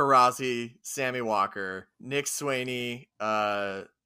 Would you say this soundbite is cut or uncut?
cut